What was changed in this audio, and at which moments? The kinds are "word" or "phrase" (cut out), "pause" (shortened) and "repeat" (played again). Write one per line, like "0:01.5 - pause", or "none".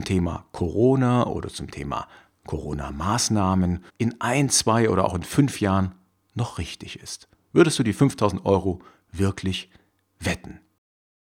0:03.9 - pause